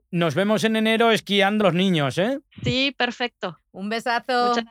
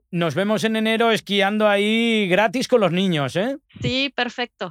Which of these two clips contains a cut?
first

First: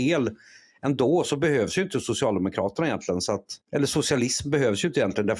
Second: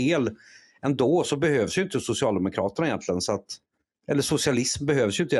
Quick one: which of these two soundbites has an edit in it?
first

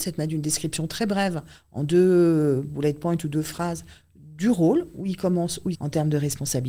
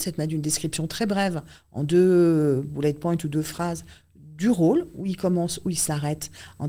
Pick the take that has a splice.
first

